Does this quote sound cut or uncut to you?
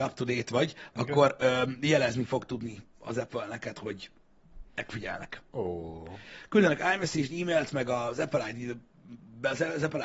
cut